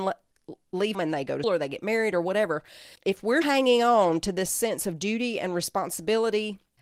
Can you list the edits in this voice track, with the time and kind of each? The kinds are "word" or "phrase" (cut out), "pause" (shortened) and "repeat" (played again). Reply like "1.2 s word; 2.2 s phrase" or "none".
0.9 s word; 1.4 s word; 3.0 s pause; 3.4 s word